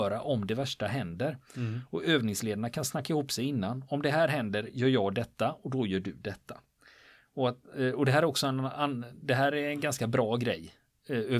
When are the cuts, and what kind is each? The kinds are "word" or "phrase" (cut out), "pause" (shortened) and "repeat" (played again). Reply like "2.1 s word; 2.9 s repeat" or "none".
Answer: none